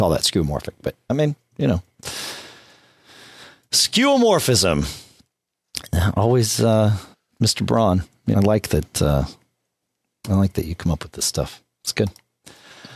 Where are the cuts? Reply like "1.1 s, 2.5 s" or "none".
1.0 s, 7.1 s, 8.3 s